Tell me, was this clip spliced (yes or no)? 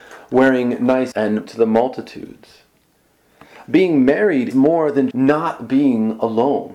yes